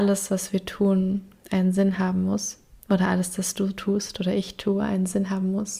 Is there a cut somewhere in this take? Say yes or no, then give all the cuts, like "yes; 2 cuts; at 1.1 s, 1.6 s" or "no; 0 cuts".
no; 0 cuts